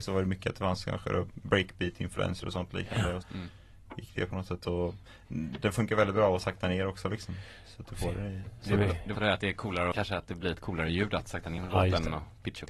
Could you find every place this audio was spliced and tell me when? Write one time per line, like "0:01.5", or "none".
0:03.2
0:09.1
0:09.9
0:11.6